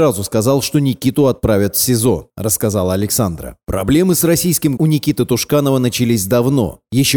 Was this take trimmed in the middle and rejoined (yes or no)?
yes